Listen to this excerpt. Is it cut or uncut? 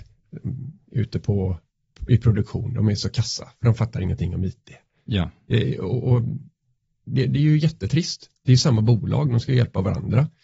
uncut